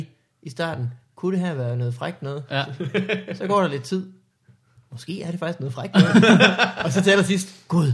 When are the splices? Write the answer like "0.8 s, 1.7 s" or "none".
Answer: none